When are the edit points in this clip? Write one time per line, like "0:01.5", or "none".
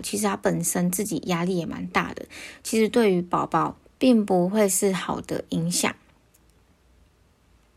0:03.9